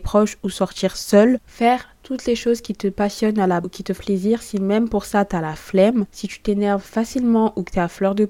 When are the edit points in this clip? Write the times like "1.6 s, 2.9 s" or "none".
1.4 s, 3.6 s, 4.0 s